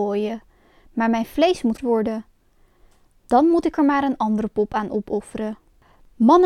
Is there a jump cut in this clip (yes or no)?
yes